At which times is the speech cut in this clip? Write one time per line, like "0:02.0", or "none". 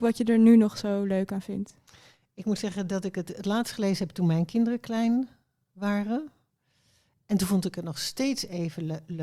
none